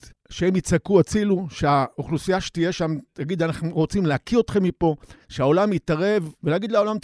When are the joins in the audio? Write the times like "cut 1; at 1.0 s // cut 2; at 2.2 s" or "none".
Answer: cut 1; at 5.2 s